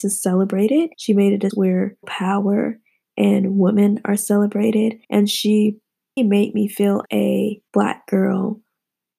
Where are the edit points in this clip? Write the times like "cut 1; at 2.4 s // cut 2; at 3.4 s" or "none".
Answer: cut 1; at 0.9 s // cut 2; at 1.5 s // cut 3; at 2.0 s // cut 4; at 5.0 s // cut 5; at 6.2 s // cut 6; at 7.1 s // cut 7; at 7.7 s